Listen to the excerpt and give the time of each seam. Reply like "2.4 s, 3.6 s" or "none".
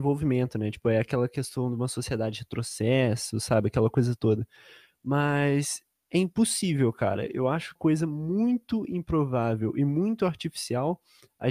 7.8 s